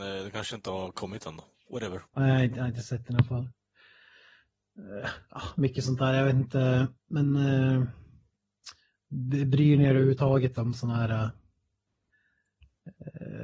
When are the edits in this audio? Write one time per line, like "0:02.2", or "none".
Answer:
0:02.1
0:07.0